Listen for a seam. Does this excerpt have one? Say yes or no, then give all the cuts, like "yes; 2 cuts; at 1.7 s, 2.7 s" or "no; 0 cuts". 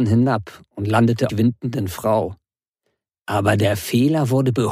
yes; 1 cut; at 1.3 s